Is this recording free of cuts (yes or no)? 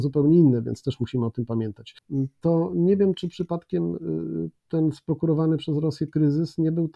yes